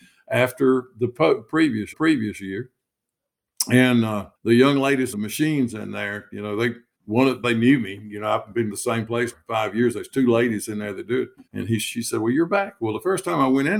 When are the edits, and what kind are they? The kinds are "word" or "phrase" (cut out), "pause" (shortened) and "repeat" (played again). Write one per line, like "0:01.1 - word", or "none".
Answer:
0:01.9 - repeat
0:04.4 - pause
0:05.1 - phrase
0:06.9 - pause
0:07.4 - word
0:08.7 - phrase
0:09.3 - word
0:11.5 - pause